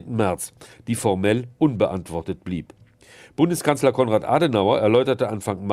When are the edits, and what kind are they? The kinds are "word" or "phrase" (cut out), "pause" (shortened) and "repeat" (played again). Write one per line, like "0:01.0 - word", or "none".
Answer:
none